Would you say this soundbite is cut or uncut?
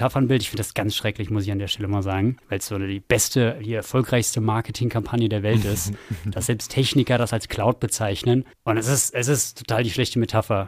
cut